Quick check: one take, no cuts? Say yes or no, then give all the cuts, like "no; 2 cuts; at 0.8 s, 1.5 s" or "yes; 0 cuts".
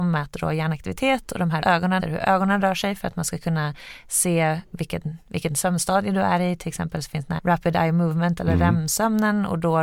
no; 4 cuts; at 1.6 s, 2.0 s, 4.7 s, 7.4 s